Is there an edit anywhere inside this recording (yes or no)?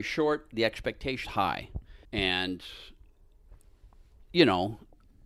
yes